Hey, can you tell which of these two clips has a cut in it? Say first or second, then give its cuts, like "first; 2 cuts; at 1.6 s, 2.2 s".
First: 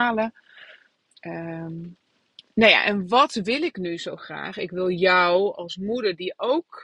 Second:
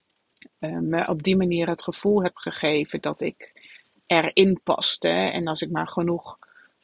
first; 1 cut; at 2.5 s